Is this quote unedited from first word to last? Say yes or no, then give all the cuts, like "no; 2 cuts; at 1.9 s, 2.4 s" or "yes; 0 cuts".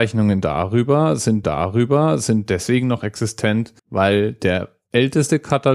no; 2 cuts; at 1.4 s, 3.8 s